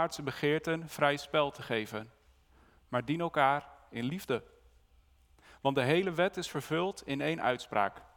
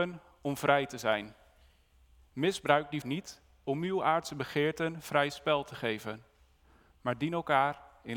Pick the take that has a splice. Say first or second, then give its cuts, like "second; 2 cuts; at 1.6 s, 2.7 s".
second; 1 cut; at 3.0 s